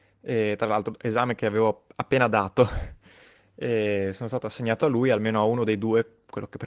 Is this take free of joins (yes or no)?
yes